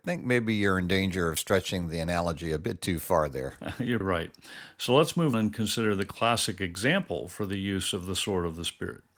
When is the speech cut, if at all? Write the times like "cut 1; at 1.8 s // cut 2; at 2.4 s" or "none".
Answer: cut 1; at 4.0 s // cut 2; at 5.3 s